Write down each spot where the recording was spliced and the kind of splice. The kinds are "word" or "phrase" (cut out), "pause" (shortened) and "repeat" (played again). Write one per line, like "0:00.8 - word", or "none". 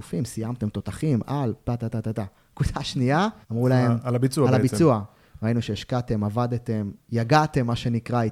0:03.4 - pause